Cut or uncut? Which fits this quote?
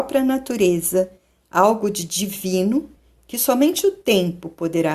uncut